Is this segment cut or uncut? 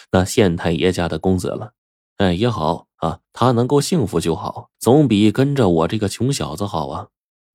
cut